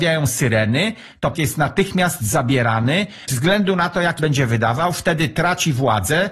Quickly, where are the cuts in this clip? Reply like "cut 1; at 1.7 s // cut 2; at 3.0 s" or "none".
cut 1; at 1.3 s // cut 2; at 3.3 s // cut 3; at 4.2 s